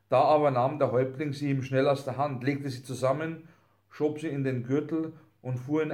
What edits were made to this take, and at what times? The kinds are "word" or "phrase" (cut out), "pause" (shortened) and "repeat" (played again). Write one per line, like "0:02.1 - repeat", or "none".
none